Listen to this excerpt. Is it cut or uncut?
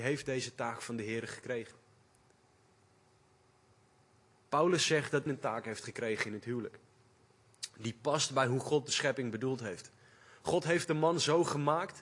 cut